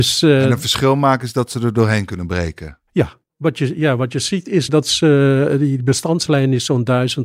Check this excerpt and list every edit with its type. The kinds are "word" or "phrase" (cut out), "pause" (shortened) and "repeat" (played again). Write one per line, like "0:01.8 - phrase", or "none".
0:04.7 - word